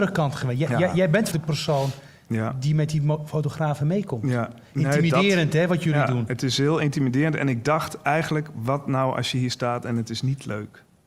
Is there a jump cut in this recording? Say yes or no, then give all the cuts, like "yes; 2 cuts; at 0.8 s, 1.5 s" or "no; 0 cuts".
yes; 1 cut; at 1.3 s